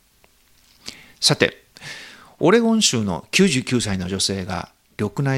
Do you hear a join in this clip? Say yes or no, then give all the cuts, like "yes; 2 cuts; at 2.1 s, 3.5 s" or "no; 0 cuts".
no; 0 cuts